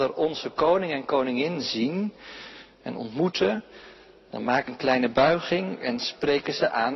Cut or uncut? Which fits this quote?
cut